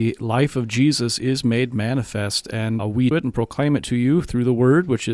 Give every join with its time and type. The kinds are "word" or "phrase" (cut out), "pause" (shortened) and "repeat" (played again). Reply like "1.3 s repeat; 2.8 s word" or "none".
2.8 s word; 3.1 s phrase